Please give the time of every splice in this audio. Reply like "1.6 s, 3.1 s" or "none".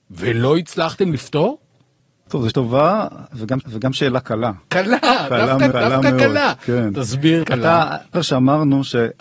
2.0 s, 2.5 s, 3.6 s, 4.6 s, 5.7 s, 7.4 s, 8.1 s